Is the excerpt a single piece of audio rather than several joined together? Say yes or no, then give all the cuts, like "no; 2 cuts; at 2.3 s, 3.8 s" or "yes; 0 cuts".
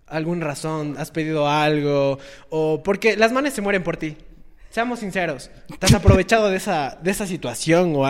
yes; 0 cuts